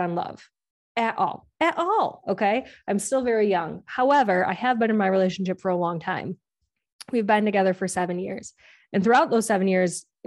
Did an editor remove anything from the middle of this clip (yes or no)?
no